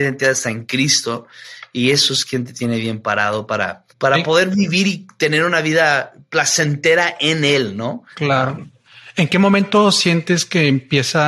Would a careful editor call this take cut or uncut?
cut